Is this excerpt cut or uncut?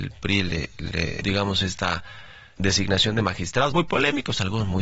cut